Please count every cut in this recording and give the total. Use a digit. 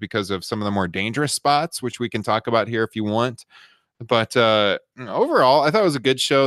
0